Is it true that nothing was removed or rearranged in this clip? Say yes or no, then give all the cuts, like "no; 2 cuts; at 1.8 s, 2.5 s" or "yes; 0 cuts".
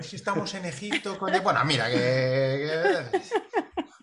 yes; 0 cuts